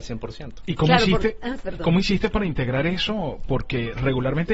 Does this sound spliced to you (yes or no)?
no